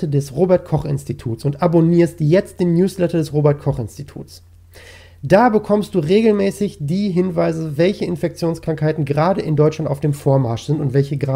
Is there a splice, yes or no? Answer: no